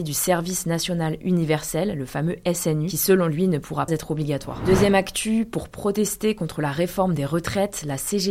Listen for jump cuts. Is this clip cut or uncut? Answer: cut